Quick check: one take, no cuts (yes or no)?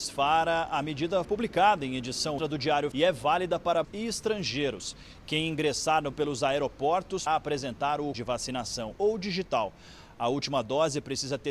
no